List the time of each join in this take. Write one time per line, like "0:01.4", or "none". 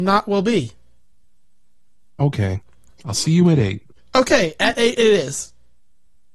none